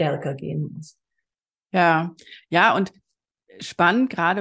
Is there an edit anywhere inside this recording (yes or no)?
no